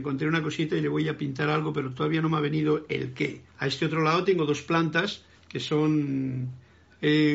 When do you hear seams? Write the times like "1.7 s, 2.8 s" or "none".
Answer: 3.5 s, 5.4 s